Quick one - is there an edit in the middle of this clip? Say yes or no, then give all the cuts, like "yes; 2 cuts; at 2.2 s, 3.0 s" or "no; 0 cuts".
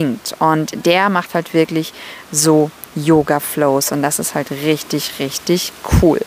no; 0 cuts